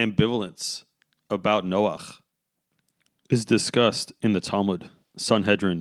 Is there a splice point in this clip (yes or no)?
no